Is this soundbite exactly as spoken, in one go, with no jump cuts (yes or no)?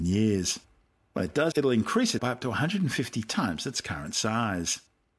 no